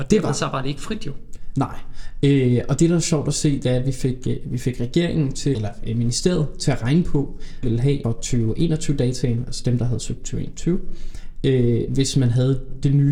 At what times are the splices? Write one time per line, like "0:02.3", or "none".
0:05.5
0:07.6
0:08.0
0:10.2
0:11.9

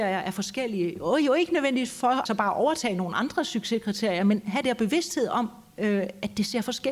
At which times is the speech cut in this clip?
0:02.3
0:04.6

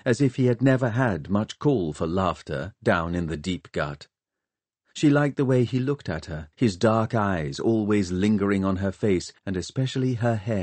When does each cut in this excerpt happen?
0:06.5
0:09.4

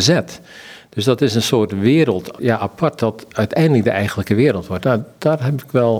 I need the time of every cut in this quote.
0:02.4

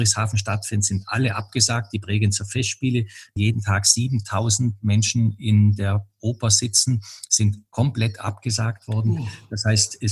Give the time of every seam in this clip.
0:03.4

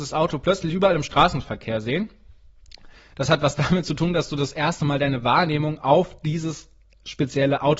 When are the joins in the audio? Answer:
none

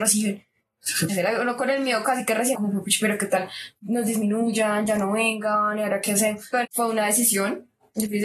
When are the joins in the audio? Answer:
0:01.1
0:02.0
0:02.5
0:06.6

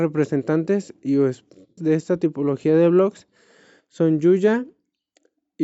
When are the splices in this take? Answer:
0:01.8

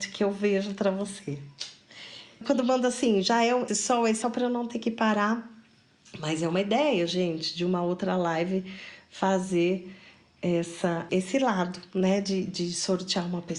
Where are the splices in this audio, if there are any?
0:02.4
0:03.7
0:04.2
0:11.1

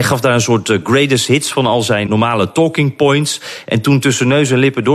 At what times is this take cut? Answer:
0:02.1

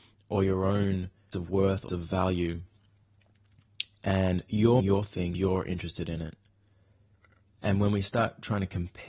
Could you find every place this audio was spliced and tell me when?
0:01.3
0:01.9
0:04.8
0:05.3

